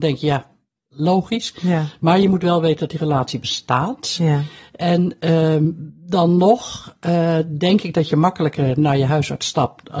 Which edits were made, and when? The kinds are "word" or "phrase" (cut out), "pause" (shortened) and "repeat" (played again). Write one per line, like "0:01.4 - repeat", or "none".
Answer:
none